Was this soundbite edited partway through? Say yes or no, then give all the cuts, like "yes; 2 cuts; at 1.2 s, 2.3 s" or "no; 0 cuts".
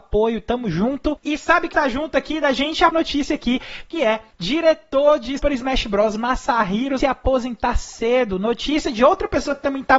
yes; 4 cuts; at 1.7 s, 2.9 s, 5.4 s, 7.0 s